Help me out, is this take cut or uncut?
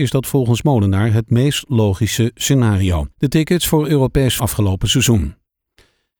cut